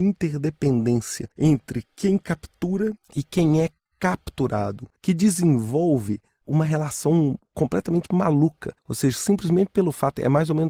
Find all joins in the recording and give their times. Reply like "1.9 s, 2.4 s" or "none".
1.3 s, 3.0 s, 5.0 s, 8.8 s